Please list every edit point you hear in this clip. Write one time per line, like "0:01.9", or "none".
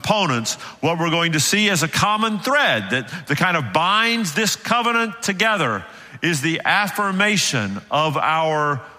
none